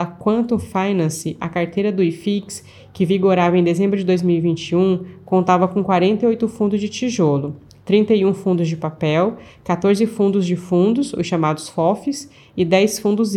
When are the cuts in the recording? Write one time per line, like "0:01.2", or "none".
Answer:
none

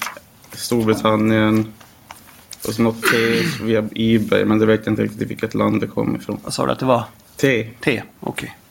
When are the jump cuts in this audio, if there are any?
0:02.6

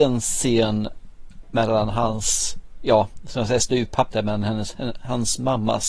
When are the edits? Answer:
0:04.1

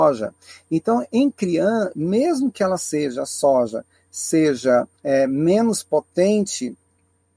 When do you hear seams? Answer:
0:05.0

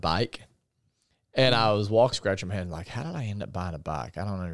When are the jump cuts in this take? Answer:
0:02.1

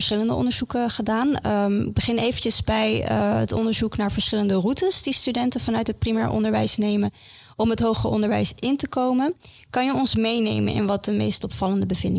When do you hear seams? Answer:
none

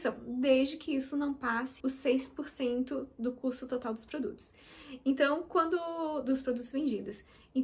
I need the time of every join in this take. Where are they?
0:01.8

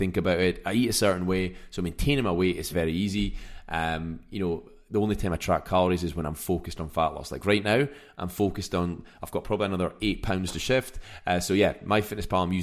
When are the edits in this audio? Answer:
0:02.7

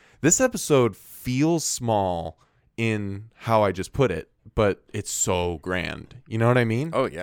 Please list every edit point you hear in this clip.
none

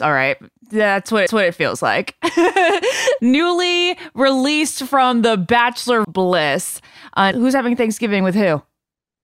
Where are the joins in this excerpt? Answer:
0:01.3
0:03.2
0:06.0
0:07.3

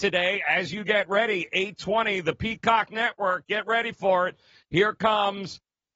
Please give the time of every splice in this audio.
none

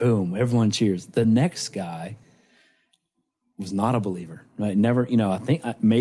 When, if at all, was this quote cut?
none

